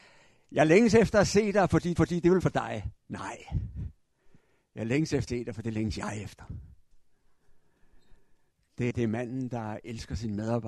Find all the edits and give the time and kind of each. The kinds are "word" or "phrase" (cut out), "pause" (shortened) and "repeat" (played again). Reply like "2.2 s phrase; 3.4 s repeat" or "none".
2.0 s repeat; 2.4 s phrase; 3.0 s pause; 5.3 s word; 8.9 s word